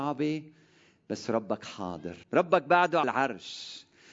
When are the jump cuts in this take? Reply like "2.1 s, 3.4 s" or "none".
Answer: 2.2 s, 3.0 s